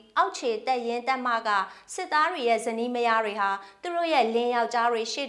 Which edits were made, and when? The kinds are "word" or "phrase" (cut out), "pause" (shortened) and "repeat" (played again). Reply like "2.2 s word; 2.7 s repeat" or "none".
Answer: none